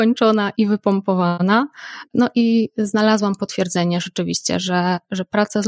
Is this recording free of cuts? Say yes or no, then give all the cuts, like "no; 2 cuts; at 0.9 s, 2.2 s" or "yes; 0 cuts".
yes; 0 cuts